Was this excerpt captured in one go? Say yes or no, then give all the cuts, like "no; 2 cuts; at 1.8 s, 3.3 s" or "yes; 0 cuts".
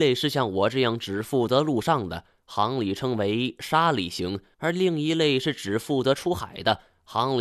no; 1 cut; at 4.5 s